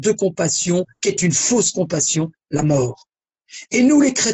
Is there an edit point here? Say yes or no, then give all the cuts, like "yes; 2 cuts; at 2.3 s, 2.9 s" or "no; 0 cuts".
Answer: no; 0 cuts